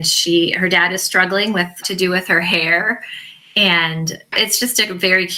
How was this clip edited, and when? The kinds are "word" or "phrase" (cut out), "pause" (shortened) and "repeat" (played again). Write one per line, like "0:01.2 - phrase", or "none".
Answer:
0:01.8 - word